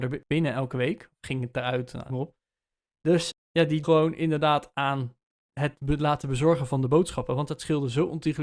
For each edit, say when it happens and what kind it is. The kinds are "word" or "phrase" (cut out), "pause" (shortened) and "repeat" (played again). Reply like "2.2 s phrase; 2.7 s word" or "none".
2.1 s word; 3.3 s word; 3.8 s word